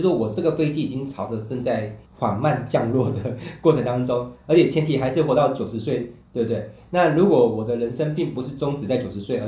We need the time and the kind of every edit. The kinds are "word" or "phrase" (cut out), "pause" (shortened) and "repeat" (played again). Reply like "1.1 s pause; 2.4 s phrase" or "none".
2.1 s pause